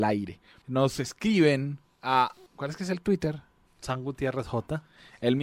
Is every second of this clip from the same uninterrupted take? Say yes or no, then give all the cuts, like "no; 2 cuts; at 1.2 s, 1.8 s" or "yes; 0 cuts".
yes; 0 cuts